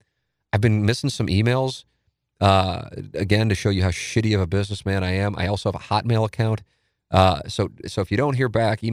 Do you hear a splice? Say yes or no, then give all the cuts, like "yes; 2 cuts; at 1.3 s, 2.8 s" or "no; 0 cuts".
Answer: no; 0 cuts